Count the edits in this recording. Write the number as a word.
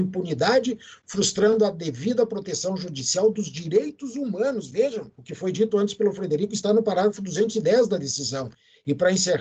one